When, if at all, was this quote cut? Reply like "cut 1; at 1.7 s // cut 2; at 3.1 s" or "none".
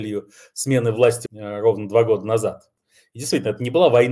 cut 1; at 1.3 s